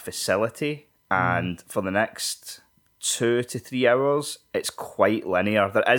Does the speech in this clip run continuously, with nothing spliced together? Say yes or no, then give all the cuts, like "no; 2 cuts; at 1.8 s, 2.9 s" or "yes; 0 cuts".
no; 1 cut; at 2.8 s